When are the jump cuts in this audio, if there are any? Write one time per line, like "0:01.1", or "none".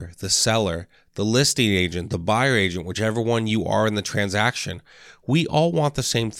none

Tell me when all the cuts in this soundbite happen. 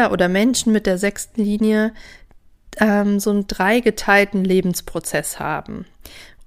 none

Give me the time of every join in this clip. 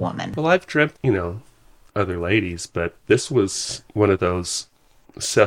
0:00.9
0:01.9

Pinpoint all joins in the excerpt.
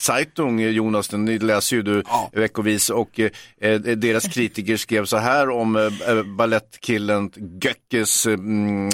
none

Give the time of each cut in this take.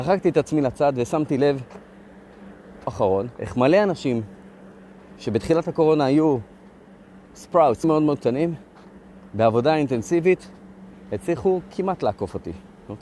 0:02.9
0:03.3
0:07.8

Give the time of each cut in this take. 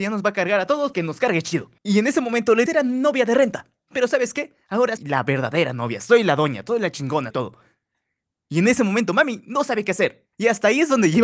0:00.9
0:01.8
0:02.7
0:05.0
0:07.3
0:10.3

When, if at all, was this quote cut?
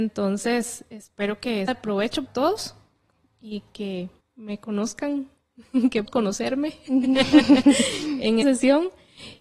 0:01.7
0:02.3
0:04.2
0:06.1
0:08.4

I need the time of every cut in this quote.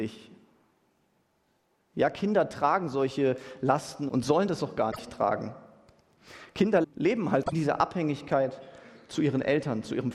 0:04.1
0:06.8
0:07.4

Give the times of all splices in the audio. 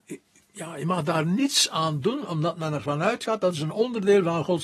none

